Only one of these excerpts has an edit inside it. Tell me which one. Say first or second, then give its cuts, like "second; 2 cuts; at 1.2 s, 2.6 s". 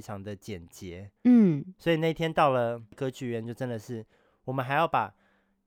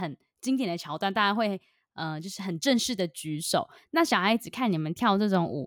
first; 1 cut; at 1.2 s